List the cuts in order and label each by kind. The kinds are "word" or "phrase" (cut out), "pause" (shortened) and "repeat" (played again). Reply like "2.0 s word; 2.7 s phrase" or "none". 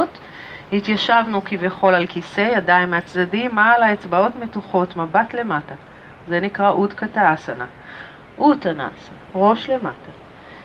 6.2 s pause; 9.3 s pause